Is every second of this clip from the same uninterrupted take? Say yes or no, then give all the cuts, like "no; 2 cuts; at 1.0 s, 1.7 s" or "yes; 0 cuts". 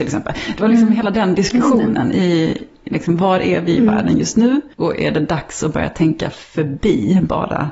no; 1 cut; at 4.7 s